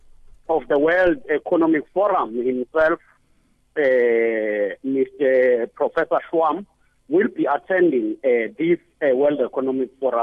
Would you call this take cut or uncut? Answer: uncut